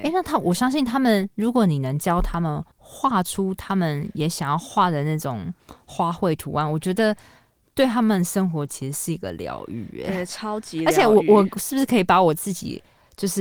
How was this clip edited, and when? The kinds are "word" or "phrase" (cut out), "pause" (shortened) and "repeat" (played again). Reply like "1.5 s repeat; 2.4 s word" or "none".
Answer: 2.7 s pause